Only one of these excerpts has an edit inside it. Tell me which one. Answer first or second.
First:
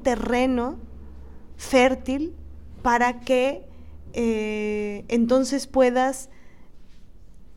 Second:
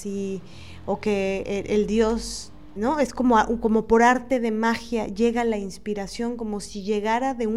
second